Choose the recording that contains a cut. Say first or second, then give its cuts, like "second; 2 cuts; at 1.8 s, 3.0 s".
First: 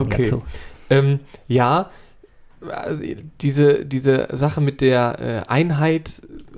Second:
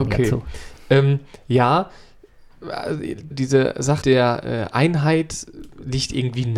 second; 2 cuts; at 3.3 s, 4.0 s